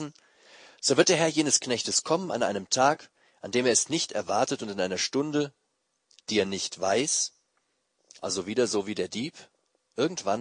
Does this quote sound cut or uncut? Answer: uncut